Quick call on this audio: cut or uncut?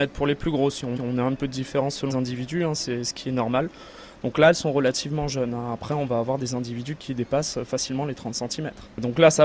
cut